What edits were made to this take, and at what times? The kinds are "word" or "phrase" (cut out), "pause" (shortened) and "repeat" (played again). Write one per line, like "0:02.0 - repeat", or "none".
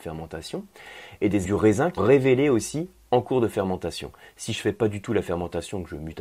0:01.4 - word
0:02.0 - word